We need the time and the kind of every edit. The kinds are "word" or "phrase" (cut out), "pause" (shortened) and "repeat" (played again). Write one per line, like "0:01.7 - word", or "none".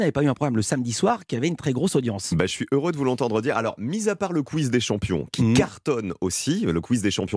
0:01.6 - word